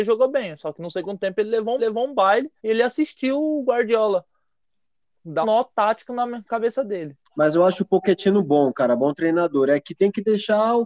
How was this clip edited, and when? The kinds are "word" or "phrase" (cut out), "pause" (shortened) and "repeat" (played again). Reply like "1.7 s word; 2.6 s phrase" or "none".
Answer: 1.8 s repeat; 2.6 s pause; 5.4 s word; 7.3 s pause